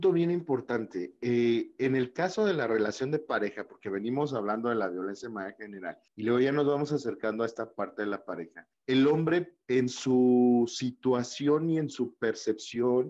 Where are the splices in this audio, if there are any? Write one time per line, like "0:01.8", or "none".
0:06.1
0:08.7